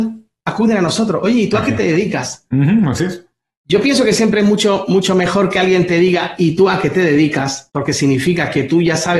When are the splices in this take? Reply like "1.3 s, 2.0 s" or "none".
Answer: none